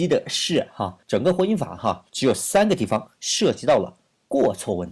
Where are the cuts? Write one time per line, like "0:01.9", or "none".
0:01.0
0:02.1